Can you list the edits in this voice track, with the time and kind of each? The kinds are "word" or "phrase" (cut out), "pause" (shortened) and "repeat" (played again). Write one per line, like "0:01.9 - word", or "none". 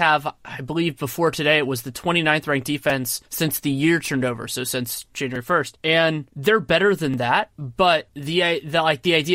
none